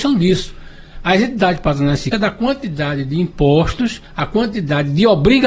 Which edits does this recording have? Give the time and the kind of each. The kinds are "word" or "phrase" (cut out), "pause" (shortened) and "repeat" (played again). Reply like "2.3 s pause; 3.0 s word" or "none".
2.1 s word; 4.0 s pause